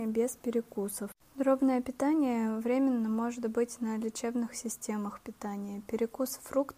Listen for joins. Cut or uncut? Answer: uncut